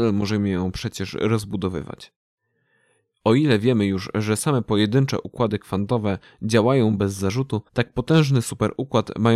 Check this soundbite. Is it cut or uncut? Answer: cut